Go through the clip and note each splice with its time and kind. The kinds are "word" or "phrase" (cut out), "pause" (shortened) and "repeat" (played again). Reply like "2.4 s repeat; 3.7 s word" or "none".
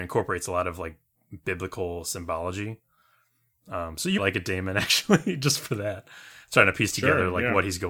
4.2 s word